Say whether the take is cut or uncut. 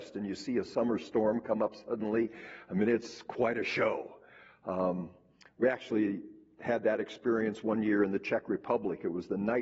uncut